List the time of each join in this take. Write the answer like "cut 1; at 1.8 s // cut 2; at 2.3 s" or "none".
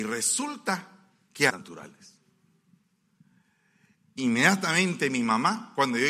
cut 1; at 1.5 s